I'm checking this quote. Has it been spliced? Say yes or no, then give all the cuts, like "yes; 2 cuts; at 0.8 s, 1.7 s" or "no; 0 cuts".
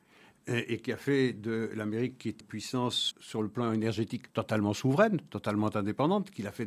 yes; 3 cuts; at 2.4 s, 3.1 s, 4.3 s